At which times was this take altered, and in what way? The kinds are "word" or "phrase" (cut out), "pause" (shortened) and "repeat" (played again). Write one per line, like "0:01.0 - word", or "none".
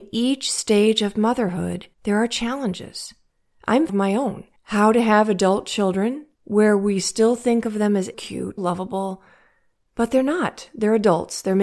0:01.9 - pause
0:03.9 - phrase
0:04.6 - pause
0:06.3 - pause
0:08.1 - phrase
0:08.6 - word